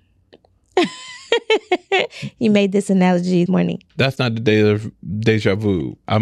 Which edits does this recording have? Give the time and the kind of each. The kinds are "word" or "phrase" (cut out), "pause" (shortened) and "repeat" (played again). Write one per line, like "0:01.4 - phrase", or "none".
0:03.5 - word
0:03.9 - pause